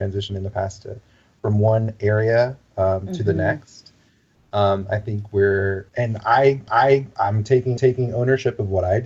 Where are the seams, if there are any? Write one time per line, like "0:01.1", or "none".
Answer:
0:05.9
0:06.7
0:07.8

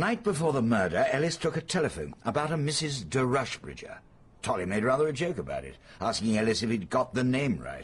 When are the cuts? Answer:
0:02.1

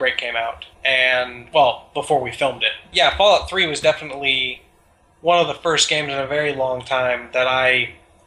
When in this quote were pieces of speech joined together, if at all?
none

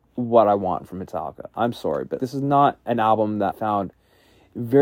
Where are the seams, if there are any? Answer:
0:02.2
0:03.5

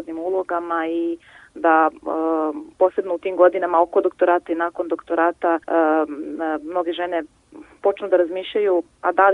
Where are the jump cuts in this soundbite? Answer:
0:02.7
0:05.6

